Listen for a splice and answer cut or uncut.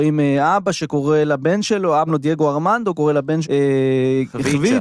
cut